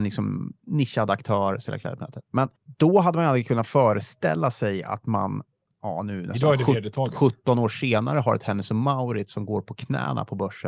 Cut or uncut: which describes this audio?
cut